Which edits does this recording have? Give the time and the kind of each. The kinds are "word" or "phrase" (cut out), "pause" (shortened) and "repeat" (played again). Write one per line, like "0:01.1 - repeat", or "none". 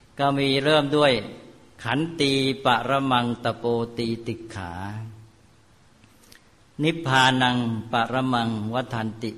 none